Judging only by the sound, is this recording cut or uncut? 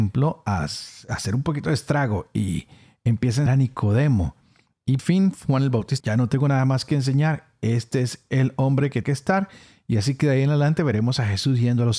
cut